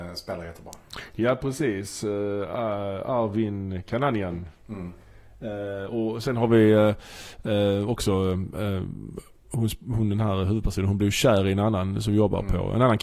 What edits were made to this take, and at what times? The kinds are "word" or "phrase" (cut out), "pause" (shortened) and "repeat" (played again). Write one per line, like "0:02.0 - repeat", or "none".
none